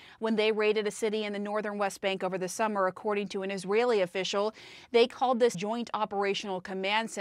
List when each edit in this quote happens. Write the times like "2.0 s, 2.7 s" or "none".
5.5 s